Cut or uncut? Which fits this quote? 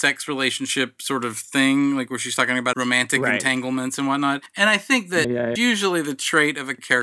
cut